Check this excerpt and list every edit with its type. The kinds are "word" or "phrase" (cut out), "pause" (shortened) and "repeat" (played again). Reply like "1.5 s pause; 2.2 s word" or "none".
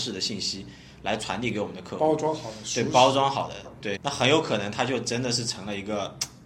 4.0 s word